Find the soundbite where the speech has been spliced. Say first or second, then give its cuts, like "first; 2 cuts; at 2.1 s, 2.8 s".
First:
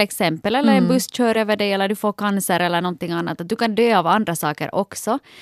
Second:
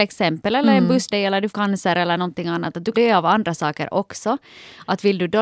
second; 3 cuts; at 1.1 s, 1.5 s, 2.9 s